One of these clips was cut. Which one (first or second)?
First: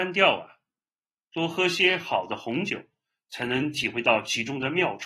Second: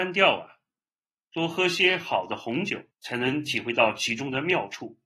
second